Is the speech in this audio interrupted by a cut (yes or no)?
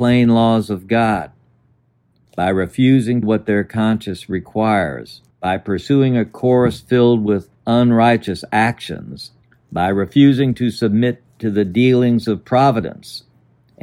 yes